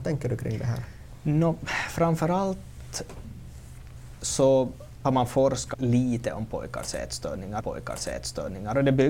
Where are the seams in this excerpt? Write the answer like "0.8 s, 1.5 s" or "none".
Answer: 5.0 s, 5.7 s, 7.6 s

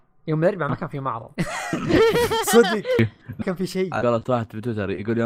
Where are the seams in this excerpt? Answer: 1.4 s, 3.4 s, 4.0 s

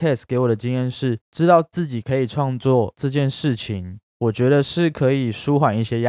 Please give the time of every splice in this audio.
1.2 s, 4.1 s

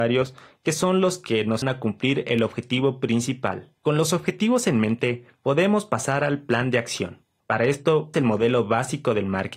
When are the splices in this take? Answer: 1.6 s, 3.8 s, 7.4 s, 8.1 s

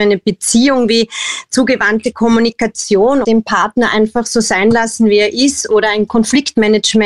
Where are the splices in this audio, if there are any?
3.2 s, 6.1 s

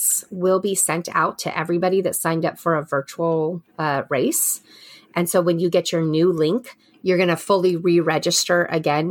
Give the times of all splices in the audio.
3.7 s

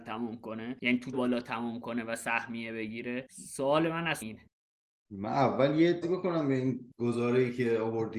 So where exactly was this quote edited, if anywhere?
1.1 s, 4.2 s, 6.0 s

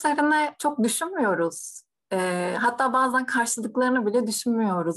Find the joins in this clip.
none

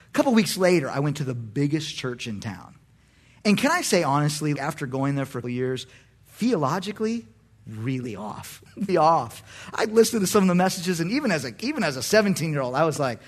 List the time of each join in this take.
4.6 s, 5.4 s, 8.9 s

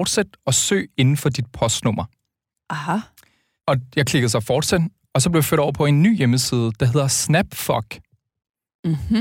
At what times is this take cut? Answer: none

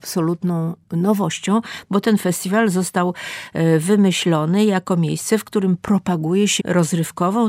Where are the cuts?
6.6 s

